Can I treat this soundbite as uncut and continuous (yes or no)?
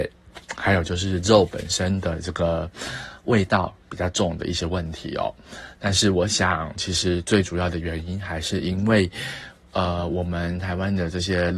no